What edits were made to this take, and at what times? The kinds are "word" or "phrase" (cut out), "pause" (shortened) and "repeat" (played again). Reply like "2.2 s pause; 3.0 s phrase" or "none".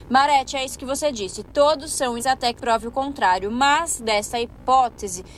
2.2 s word; 2.6 s word; 4.0 s word